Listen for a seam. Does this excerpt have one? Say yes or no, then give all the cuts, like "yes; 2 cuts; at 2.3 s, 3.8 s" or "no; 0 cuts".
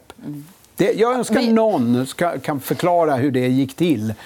no; 0 cuts